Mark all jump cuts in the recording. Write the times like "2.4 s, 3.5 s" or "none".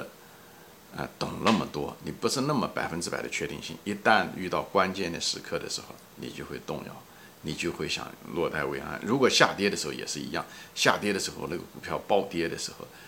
6.1 s